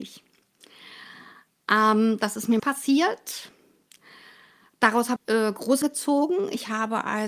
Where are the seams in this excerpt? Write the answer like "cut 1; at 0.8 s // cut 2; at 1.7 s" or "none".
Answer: cut 1; at 2.6 s // cut 2; at 5.2 s // cut 3; at 5.8 s